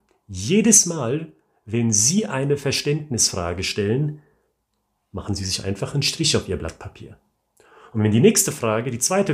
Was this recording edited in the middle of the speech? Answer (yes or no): no